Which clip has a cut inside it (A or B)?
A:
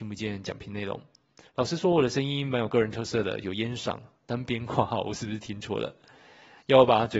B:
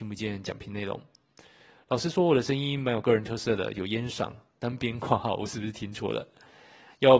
A